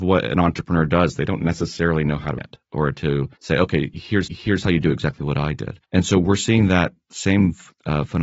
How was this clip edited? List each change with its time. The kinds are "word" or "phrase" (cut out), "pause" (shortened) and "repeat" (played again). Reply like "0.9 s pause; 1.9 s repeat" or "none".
2.4 s word; 3.4 s pause; 4.3 s repeat; 5.8 s pause